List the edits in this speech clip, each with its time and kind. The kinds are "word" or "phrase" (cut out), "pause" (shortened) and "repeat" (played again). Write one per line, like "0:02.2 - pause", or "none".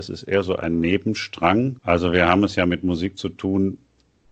0:01.8 - pause